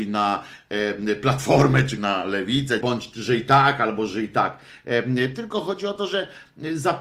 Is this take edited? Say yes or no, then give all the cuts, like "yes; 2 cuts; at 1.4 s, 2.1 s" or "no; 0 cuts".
yes; 2 cuts; at 2.0 s, 2.8 s